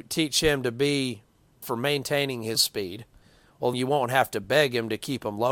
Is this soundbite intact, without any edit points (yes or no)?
no